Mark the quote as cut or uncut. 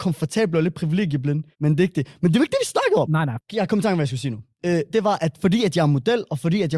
cut